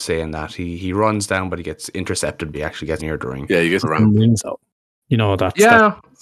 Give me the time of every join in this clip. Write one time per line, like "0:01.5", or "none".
0:02.5
0:03.0
0:03.8
0:04.4